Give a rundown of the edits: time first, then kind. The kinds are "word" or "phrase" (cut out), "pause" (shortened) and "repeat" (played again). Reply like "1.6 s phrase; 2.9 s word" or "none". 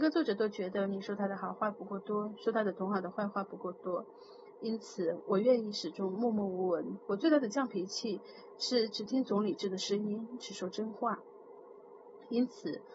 none